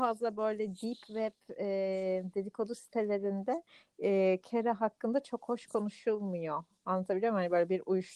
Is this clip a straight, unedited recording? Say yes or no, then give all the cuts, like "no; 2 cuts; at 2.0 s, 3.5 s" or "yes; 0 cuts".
yes; 0 cuts